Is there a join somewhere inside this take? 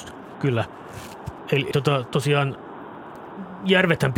yes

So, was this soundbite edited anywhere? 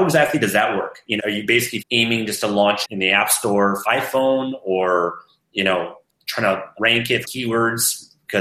yes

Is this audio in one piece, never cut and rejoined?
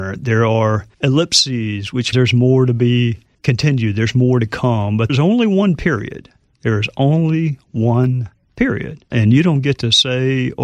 no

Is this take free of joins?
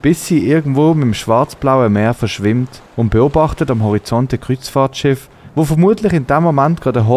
no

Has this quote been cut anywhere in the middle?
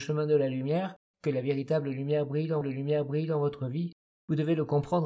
yes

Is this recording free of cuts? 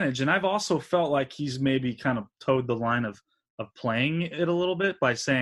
yes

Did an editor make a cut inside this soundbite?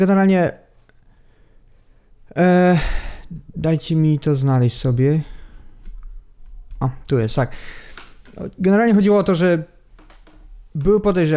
no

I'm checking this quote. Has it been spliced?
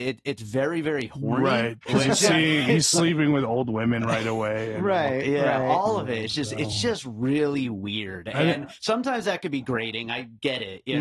no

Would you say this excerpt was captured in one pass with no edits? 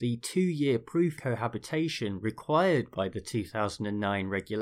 no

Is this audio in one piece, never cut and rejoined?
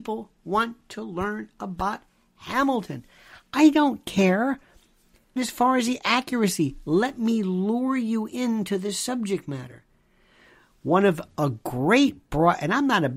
no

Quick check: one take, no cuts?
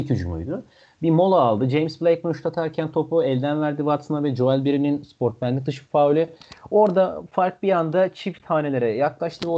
yes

